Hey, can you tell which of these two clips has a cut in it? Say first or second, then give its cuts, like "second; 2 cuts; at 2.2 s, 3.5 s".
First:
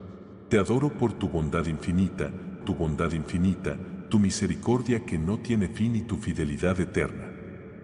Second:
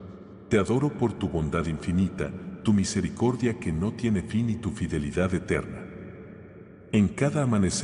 first; 1 cut; at 2.6 s